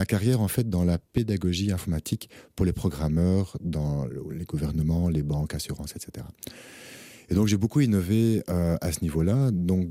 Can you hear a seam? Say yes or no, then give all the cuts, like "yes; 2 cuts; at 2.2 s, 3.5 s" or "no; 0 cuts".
no; 0 cuts